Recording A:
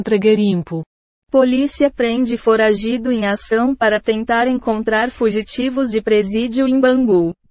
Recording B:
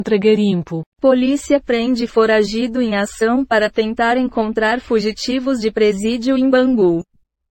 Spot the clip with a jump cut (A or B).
B